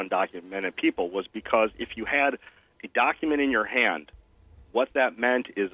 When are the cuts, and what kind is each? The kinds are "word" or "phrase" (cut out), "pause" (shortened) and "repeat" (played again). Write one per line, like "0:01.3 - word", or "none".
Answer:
none